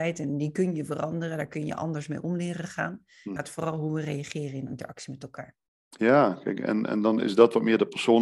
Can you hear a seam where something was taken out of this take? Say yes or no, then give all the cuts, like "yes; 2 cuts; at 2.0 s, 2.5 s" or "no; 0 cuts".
yes; 1 cut; at 3.4 s